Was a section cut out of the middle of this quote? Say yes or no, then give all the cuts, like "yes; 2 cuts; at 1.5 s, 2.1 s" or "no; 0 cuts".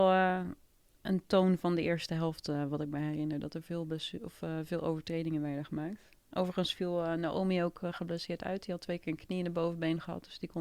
no; 0 cuts